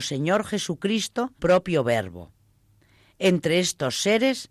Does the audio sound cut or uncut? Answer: cut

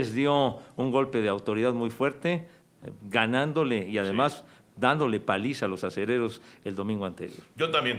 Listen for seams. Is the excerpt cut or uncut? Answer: uncut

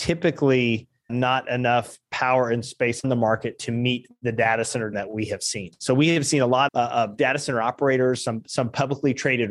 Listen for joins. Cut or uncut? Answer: cut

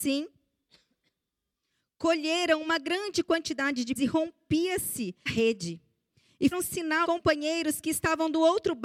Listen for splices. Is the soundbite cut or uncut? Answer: cut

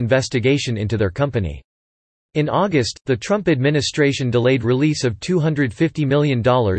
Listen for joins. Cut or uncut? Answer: uncut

